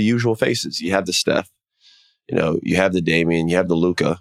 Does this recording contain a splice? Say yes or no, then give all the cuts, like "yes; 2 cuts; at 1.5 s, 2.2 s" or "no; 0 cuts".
no; 0 cuts